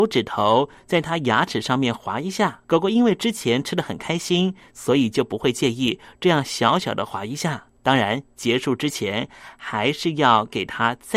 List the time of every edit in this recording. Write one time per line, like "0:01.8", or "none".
0:02.6
0:07.7